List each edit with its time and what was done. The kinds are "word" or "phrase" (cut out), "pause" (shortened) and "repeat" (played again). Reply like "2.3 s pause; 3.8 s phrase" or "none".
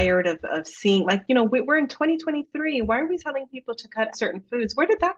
3.2 s word; 4.1 s word